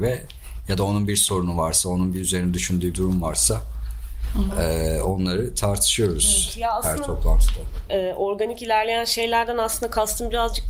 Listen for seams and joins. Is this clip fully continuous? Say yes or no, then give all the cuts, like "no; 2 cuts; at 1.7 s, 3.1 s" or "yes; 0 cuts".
no; 1 cut; at 2.9 s